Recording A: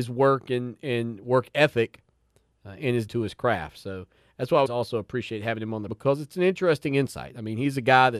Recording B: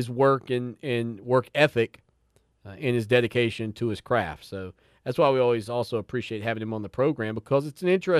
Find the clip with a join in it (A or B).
A